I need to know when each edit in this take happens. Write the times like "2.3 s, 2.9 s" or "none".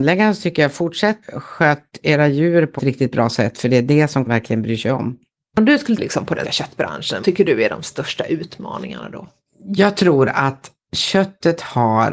1.2 s, 2.8 s, 4.3 s, 6.0 s, 6.4 s, 7.2 s